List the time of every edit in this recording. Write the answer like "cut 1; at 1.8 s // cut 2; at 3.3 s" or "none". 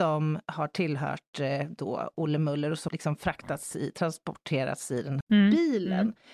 cut 1; at 2.9 s // cut 2; at 5.2 s